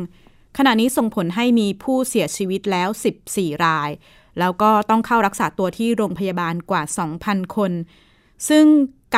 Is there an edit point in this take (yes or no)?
no